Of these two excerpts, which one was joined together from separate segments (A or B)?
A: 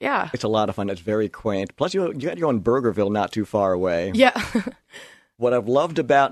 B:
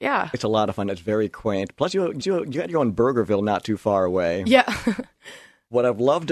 B